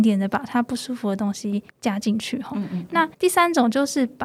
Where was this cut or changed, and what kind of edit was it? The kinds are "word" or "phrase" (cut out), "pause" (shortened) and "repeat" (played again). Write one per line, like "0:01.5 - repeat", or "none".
0:01.7 - pause
0:03.1 - pause